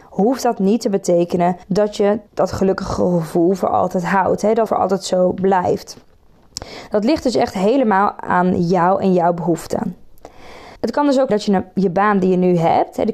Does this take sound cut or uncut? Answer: cut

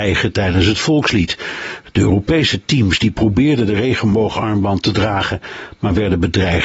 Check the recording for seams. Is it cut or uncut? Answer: uncut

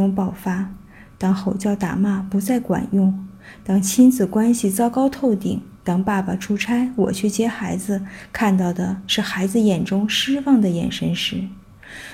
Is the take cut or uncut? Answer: cut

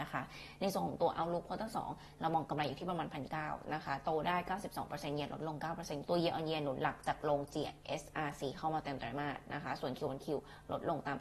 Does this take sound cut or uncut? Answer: cut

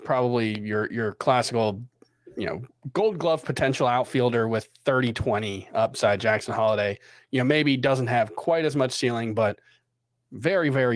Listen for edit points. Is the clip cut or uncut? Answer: uncut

